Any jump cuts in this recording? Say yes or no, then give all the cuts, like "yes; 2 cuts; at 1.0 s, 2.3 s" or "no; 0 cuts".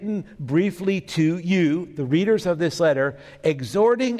no; 0 cuts